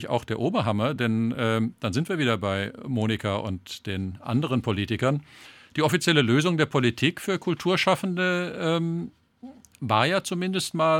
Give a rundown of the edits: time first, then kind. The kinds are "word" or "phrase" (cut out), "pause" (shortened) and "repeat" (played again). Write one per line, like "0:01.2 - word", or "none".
none